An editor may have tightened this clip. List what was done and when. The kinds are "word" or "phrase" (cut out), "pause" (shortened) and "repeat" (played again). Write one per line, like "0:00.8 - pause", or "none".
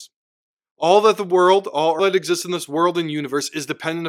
0:02.0 - word